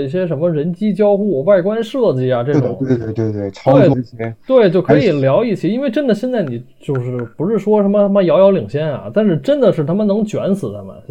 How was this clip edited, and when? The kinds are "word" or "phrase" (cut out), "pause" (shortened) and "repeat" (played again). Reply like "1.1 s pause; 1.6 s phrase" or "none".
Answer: 3.9 s word